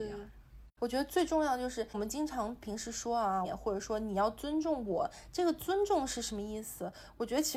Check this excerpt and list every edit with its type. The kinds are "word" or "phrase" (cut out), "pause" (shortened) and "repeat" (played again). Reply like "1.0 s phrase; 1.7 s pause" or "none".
3.4 s phrase